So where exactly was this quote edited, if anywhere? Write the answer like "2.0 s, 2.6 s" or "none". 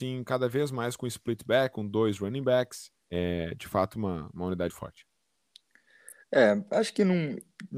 3.0 s, 4.7 s